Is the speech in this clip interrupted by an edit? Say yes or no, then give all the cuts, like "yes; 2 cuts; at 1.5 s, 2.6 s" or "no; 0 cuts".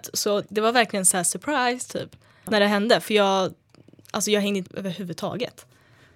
yes; 1 cut; at 4.7 s